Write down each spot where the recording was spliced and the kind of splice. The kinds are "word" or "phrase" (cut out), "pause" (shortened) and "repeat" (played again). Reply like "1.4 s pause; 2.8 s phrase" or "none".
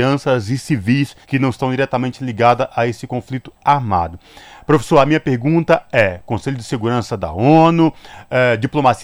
1.2 s pause